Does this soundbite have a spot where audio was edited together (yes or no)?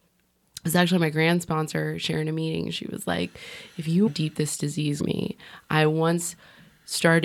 yes